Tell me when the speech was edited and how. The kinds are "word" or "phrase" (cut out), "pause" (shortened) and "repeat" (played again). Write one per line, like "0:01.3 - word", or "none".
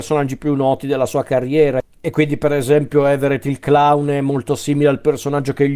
none